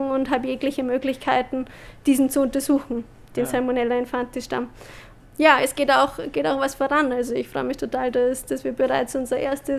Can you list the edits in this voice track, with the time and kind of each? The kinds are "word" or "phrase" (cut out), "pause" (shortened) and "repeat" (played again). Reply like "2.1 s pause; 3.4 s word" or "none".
none